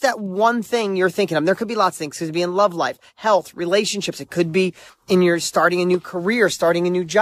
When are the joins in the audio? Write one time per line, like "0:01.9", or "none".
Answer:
none